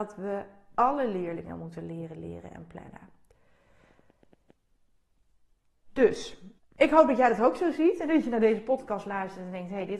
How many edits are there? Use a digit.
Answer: 1